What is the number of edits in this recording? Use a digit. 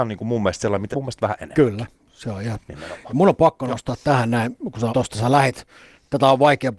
2